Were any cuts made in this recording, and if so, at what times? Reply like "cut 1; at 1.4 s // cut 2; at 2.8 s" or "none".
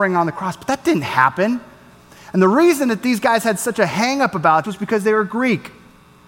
cut 1; at 4.6 s